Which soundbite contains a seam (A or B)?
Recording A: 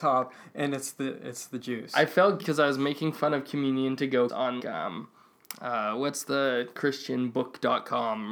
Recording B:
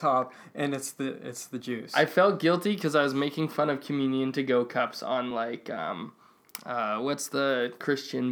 A